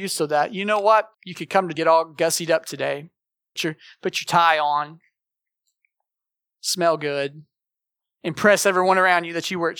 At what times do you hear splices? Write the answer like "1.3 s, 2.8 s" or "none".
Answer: 1.1 s, 1.8 s, 3.6 s